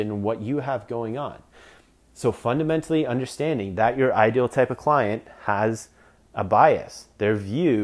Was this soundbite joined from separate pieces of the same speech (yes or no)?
no